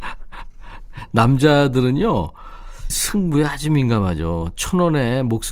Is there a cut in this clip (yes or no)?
yes